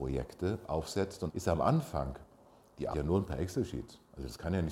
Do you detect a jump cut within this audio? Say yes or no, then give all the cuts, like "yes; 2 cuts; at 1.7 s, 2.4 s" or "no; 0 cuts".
yes; 2 cuts; at 1.3 s, 2.9 s